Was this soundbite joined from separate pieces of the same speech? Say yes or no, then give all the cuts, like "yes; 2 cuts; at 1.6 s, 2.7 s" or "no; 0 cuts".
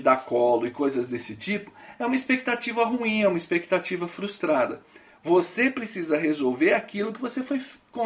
no; 0 cuts